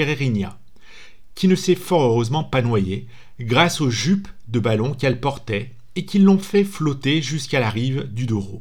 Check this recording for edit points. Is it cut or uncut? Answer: uncut